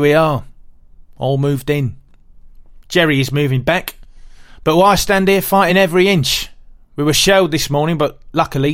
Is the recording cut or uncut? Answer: uncut